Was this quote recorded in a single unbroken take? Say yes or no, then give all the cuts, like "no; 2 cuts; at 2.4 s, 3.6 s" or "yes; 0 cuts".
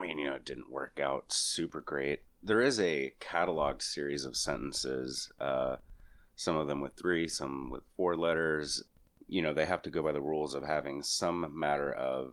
yes; 0 cuts